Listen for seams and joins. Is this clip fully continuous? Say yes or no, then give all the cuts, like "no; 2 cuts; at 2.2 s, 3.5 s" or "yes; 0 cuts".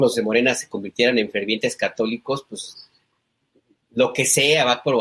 yes; 0 cuts